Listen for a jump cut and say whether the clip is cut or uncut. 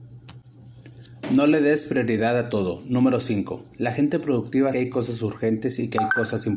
cut